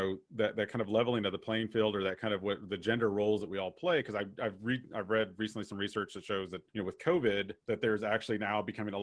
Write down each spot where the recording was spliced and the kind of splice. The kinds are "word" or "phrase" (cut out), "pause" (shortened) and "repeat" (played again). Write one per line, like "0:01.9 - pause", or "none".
0:06.7 - pause
0:07.6 - pause